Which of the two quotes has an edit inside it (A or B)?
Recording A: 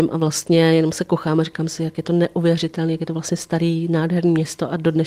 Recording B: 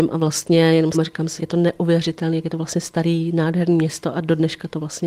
B